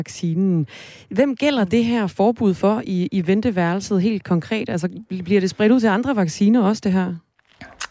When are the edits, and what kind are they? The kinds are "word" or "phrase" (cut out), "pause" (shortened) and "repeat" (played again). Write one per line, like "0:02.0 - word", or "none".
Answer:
none